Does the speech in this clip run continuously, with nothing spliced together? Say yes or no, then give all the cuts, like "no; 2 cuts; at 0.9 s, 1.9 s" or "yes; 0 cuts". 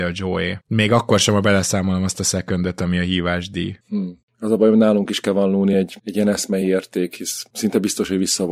yes; 0 cuts